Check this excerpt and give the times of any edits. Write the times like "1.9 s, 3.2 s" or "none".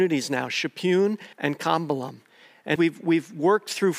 1.3 s, 2.8 s